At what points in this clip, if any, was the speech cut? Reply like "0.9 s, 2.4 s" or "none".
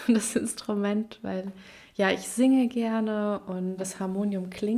3.8 s

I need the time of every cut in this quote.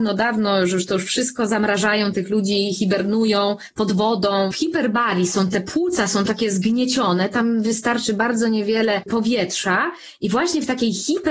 none

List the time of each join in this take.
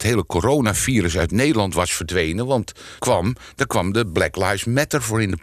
3.0 s

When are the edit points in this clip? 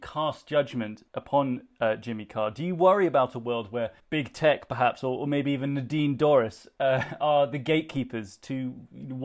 1.1 s, 4.0 s

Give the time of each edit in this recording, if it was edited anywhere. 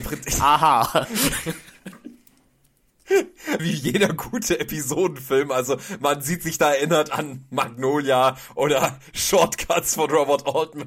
3.6 s

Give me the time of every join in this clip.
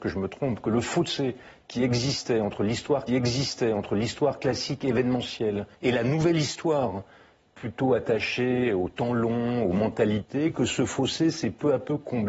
3.1 s, 5.7 s

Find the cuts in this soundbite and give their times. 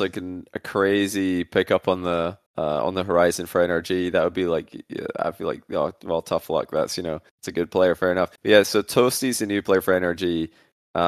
2.5 s, 7.3 s, 8.4 s

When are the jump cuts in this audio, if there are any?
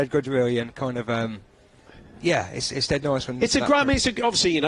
none

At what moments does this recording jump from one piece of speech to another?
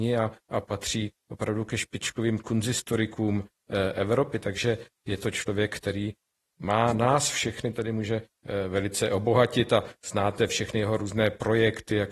none

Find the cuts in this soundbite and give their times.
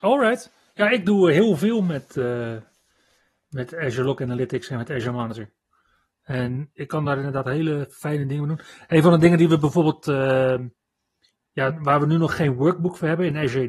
none

